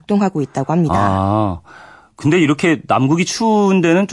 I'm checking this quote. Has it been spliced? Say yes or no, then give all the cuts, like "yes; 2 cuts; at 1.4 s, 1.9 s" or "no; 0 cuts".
no; 0 cuts